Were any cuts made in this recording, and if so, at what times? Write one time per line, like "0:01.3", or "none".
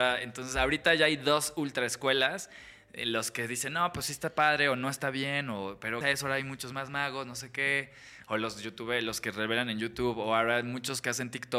0:06.0